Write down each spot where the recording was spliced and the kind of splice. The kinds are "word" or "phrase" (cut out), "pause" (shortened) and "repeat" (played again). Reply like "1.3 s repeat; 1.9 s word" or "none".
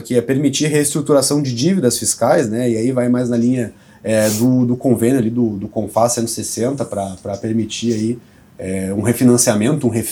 none